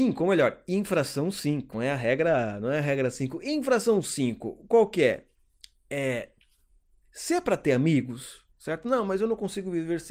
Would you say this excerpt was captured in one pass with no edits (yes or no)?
no